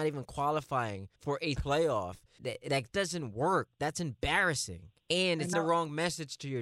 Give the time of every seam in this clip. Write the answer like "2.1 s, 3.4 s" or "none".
1.1 s, 1.6 s, 2.4 s, 2.9 s, 5.0 s, 5.5 s